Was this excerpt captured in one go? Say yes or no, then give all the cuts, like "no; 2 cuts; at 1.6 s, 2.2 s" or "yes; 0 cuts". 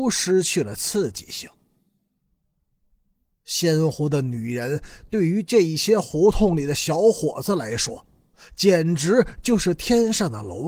yes; 0 cuts